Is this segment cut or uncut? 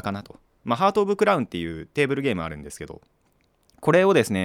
uncut